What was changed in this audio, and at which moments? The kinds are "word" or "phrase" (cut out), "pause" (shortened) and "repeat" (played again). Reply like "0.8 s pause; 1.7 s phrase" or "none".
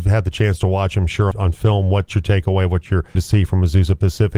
1.3 s word; 2.1 s word; 3.1 s word